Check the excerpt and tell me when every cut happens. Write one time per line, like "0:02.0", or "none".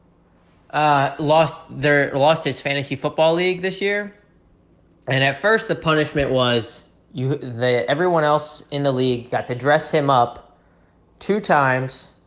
none

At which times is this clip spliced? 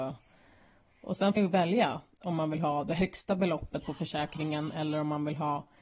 0:01.4

